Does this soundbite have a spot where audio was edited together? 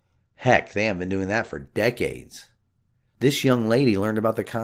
no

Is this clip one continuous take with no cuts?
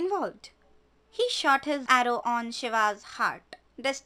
no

